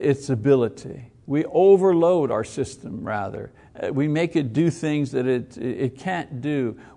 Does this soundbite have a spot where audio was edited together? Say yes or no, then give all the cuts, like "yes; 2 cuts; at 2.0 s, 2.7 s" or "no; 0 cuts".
yes; 1 cut; at 1.2 s